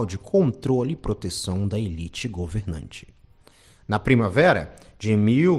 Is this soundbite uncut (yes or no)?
yes